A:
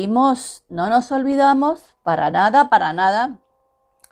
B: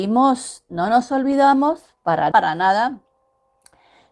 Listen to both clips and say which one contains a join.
B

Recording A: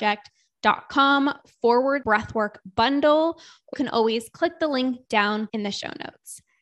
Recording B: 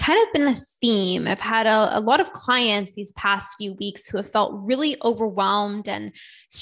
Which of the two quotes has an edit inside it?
A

